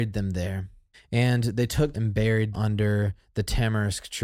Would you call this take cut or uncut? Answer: cut